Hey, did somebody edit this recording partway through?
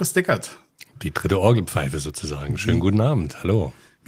no; 0 cuts

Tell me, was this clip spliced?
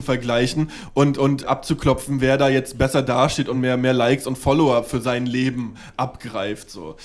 no; 0 cuts

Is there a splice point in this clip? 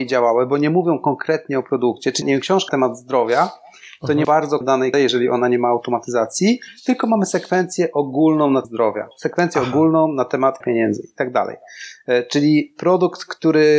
yes; 8 cuts; at 2.2 s, 2.7 s, 4.2 s, 4.6 s, 4.9 s, 8.6 s, 9.1 s, 10.6 s

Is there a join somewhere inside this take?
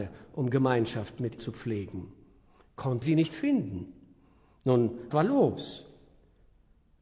yes; 3 cuts; at 1.4 s, 3.0 s, 5.1 s

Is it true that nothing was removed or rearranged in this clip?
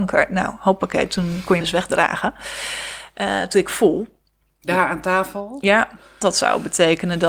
no; 3 cuts; at 1.6 s, 3.5 s, 6.2 s

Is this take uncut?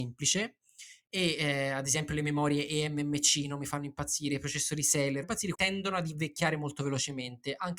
no; 2 cuts; at 5.2 s, 5.5 s

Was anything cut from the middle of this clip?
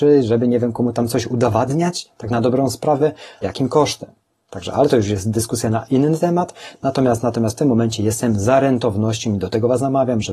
yes; 2 cuts; at 3.4 s, 4.3 s

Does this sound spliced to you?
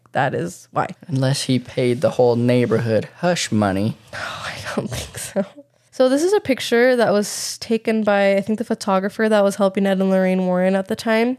yes; 2 cuts; at 1.0 s, 5.7 s

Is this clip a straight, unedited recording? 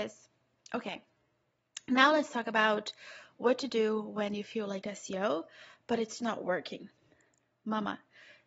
no; 2 cuts; at 4.8 s, 6.2 s

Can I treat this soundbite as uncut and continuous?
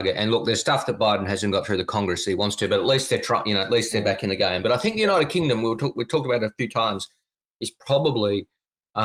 yes; 0 cuts

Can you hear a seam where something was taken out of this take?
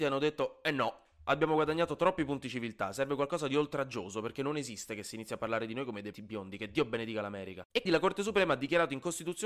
yes; 2 cuts; at 6.1 s, 7.9 s

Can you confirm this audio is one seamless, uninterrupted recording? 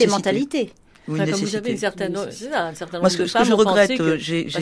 yes; 0 cuts

